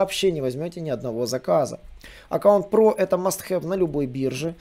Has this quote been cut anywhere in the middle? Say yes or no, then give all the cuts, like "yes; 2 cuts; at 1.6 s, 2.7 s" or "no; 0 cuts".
no; 0 cuts